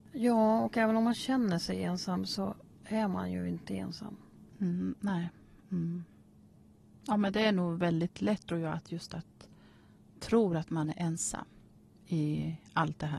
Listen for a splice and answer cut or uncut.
cut